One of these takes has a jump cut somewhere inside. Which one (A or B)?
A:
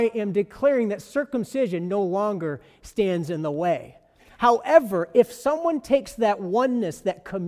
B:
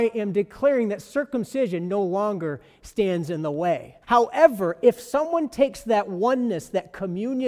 B